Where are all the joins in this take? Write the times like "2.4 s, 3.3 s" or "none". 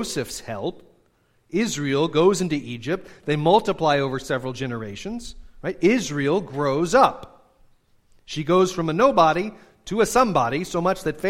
none